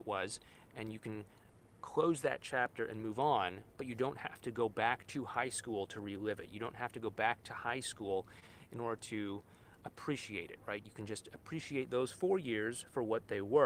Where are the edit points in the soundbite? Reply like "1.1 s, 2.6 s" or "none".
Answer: none